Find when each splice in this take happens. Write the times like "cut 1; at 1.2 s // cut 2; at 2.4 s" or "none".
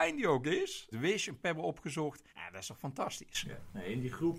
cut 1; at 0.9 s // cut 2; at 1.4 s // cut 3; at 2.3 s